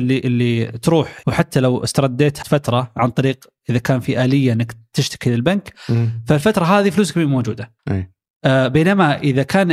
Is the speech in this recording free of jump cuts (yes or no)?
no